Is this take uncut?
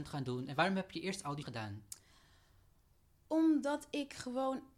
no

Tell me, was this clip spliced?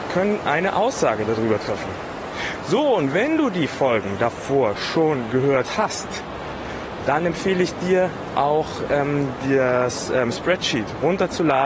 no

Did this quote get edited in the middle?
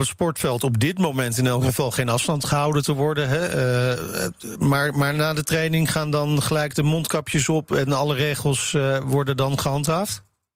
no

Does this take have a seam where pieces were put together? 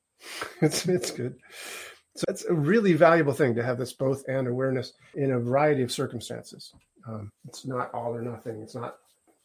yes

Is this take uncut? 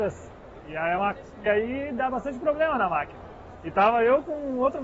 no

